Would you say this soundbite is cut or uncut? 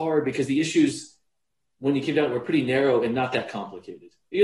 uncut